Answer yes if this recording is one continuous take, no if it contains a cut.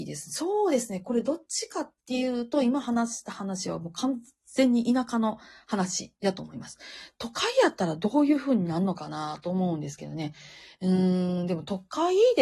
yes